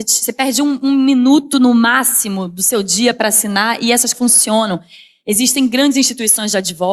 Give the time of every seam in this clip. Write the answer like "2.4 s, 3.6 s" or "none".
4.1 s

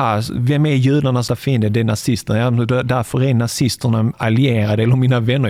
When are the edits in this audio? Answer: 1.3 s, 4.1 s

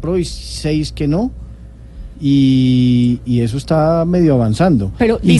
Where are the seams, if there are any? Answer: 3.3 s

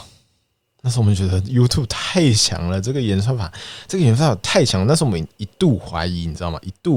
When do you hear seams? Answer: none

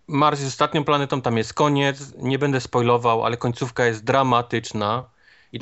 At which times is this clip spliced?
none

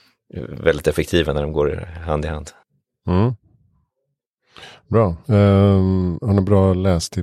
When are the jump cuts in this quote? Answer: 2.6 s

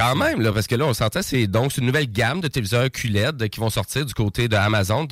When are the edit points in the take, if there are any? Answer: none

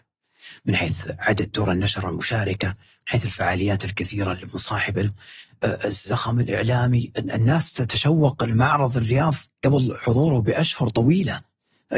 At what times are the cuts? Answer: none

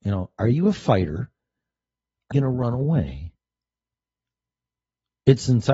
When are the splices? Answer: 2.3 s

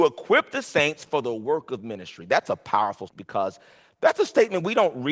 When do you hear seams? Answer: 3.1 s

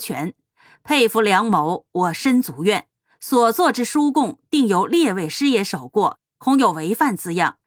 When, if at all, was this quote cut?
none

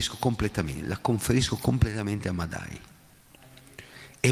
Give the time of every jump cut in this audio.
none

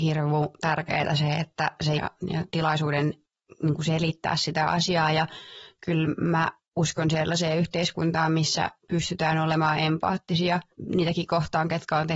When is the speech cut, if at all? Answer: 2.0 s, 8.8 s

